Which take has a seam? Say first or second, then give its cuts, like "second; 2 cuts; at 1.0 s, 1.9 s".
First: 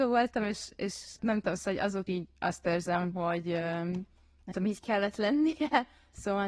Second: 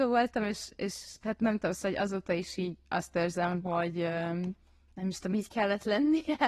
first; 3 cuts; at 1.2 s, 2.1 s, 4.5 s